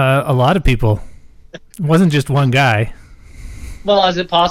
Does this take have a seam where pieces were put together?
no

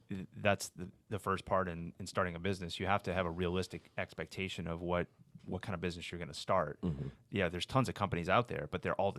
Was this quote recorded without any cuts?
yes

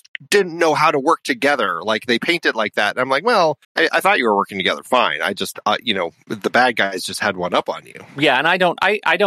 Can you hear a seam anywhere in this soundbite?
yes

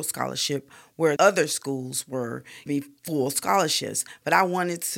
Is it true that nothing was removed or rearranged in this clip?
no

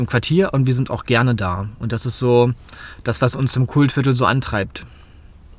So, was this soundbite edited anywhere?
no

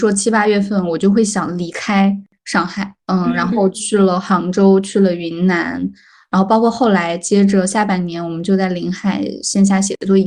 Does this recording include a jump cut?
yes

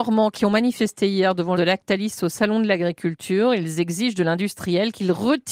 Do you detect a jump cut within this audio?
yes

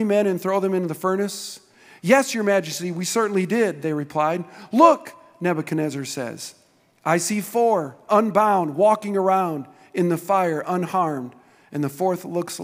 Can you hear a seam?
no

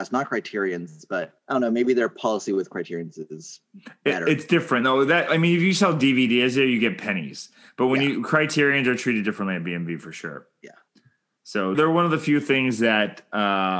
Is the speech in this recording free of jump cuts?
no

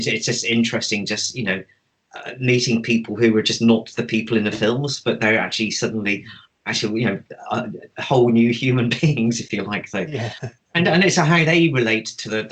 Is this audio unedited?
yes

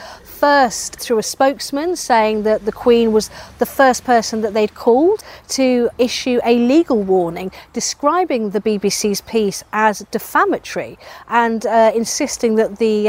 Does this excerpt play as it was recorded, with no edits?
no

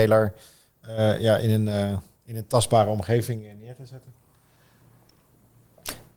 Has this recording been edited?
no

